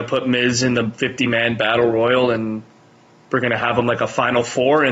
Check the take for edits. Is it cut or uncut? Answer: uncut